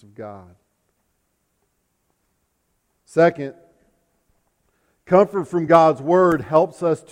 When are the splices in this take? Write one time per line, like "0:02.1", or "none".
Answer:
none